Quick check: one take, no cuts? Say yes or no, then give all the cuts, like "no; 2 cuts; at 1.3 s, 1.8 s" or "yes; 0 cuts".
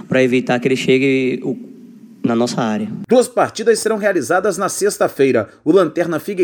yes; 0 cuts